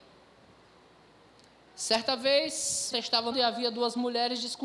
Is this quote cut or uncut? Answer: cut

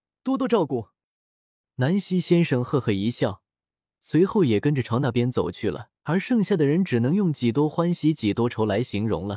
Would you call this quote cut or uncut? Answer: cut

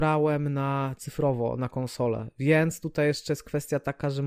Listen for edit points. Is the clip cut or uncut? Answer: uncut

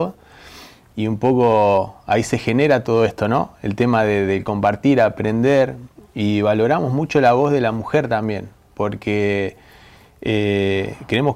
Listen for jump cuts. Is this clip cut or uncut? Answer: cut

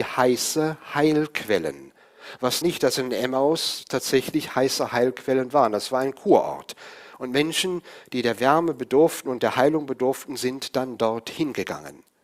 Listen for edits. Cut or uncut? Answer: cut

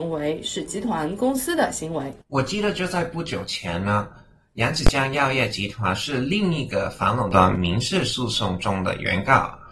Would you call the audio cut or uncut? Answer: cut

